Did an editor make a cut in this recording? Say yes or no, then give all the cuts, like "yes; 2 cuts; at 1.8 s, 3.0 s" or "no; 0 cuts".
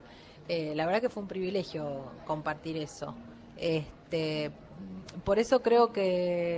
no; 0 cuts